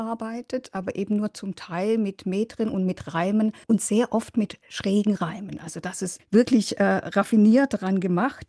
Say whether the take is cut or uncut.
cut